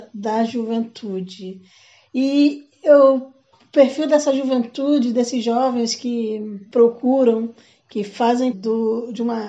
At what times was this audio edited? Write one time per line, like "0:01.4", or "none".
0:08.5

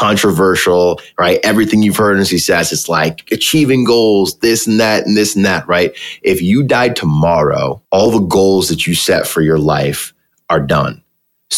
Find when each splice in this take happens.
0:07.8

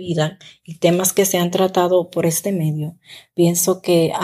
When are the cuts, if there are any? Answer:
none

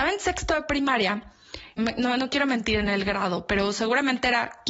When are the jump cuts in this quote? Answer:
0:01.8

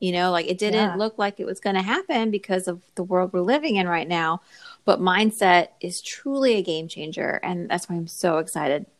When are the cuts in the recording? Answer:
none

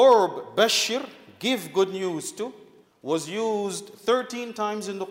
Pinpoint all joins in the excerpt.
0:02.8

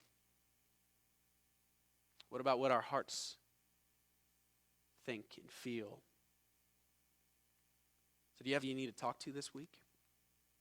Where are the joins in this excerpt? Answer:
0:08.6

